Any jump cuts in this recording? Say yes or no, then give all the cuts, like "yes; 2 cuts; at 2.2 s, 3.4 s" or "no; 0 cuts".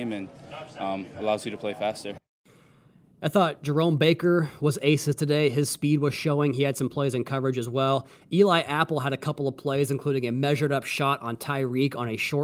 no; 0 cuts